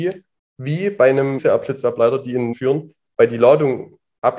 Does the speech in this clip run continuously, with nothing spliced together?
no; 2 cuts; at 1.4 s, 2.5 s

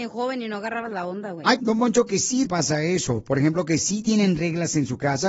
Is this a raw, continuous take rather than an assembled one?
no; 2 cuts; at 1.6 s, 2.5 s

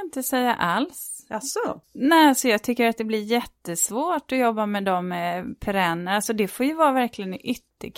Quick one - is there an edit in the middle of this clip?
yes; 1 cut; at 1.8 s

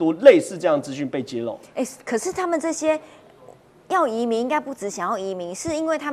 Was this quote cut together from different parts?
no; 0 cuts

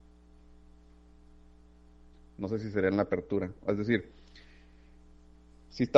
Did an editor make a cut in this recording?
no; 0 cuts

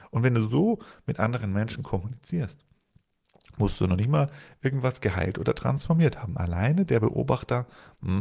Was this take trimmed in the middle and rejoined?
no; 0 cuts

